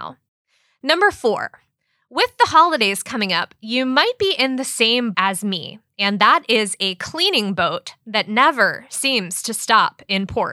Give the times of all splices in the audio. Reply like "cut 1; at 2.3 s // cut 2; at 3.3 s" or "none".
cut 1; at 5.1 s